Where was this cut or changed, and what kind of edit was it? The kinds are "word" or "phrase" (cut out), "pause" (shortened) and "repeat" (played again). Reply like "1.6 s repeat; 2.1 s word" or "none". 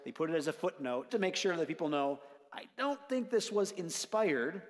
1.1 s word